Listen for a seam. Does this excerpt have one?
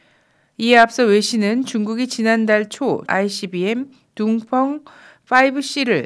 yes; 1 cut; at 3.1 s

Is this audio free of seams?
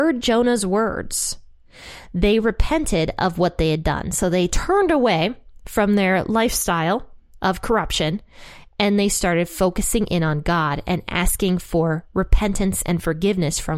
yes; 0 cuts

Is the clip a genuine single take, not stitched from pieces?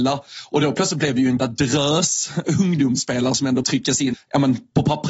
no; 3 cuts; at 1.4 s, 3.6 s, 4.1 s

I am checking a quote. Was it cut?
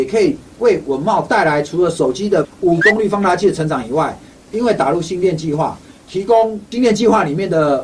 yes; 2 cuts; at 2.4 s, 2.8 s

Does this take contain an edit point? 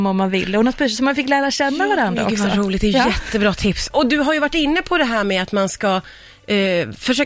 no; 0 cuts

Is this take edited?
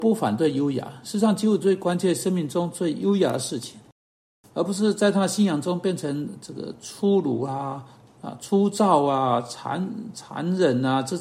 no; 0 cuts

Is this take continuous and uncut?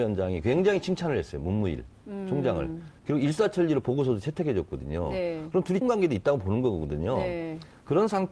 no; 1 cut; at 5.8 s

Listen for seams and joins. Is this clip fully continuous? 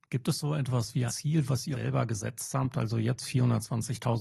no; 2 cuts; at 1.1 s, 1.7 s

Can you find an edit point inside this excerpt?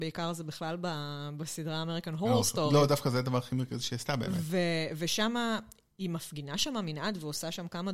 no; 0 cuts

